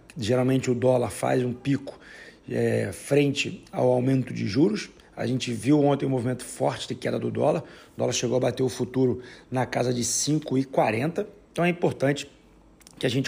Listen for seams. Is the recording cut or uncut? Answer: uncut